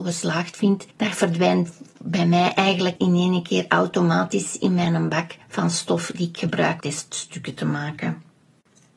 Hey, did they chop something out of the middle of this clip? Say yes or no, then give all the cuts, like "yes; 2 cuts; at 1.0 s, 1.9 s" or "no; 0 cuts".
yes; 4 cuts; at 0.9 s, 3.0 s, 5.4 s, 6.8 s